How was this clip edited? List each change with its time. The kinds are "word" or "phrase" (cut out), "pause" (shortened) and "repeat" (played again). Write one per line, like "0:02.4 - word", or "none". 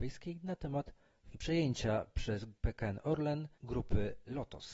0:01.3 - word
0:02.6 - pause
0:03.5 - pause